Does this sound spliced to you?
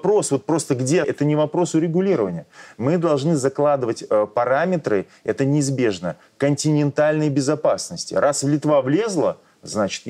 yes; 1 cut; at 1.0 s

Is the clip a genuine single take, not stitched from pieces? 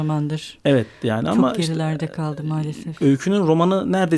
yes; 0 cuts

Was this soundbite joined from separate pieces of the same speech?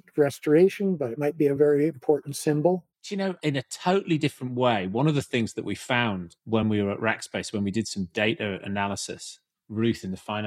no; 0 cuts

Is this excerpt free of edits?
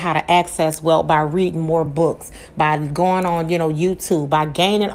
yes; 0 cuts

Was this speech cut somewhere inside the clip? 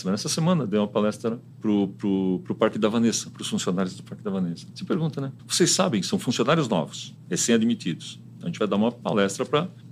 yes; 1 cut; at 5.4 s

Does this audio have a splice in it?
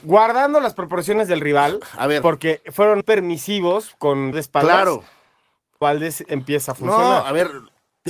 yes; 3 cuts; at 3.0 s, 4.3 s, 5.8 s

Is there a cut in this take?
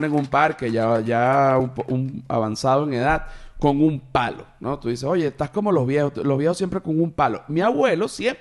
no; 0 cuts

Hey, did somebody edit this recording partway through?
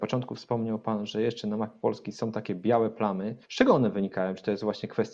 yes; 1 cut; at 3.4 s

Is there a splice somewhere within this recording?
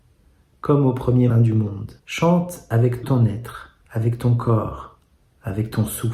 yes; 4 cuts; at 1.3 s, 2.0 s, 3.0 s, 3.8 s

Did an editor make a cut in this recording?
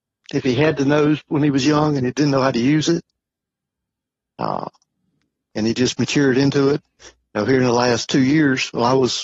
no; 0 cuts

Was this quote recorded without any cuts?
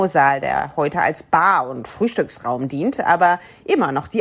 yes; 0 cuts

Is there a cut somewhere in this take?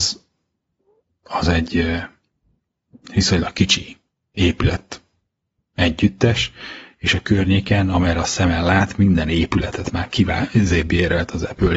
no; 0 cuts

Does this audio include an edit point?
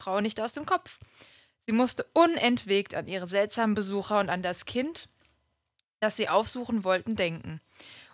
no; 0 cuts

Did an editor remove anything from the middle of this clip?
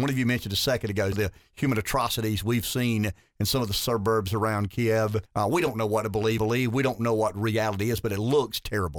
yes; 3 cuts; at 1.1 s, 5.3 s, 6.4 s

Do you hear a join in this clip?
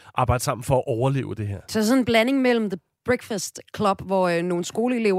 no; 0 cuts

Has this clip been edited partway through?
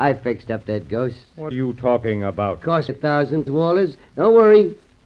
yes; 3 cuts; at 1.5 s, 2.9 s, 3.5 s

